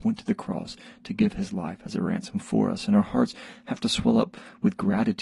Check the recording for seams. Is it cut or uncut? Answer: uncut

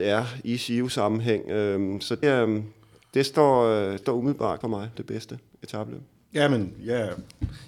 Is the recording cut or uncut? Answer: cut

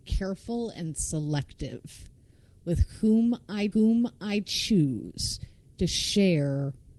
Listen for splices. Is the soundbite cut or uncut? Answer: cut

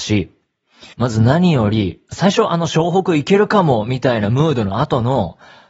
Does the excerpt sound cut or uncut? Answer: cut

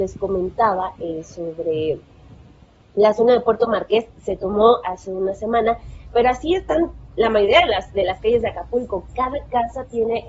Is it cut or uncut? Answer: cut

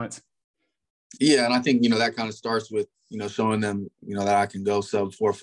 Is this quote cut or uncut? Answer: uncut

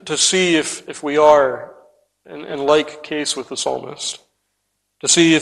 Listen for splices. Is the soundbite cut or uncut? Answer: uncut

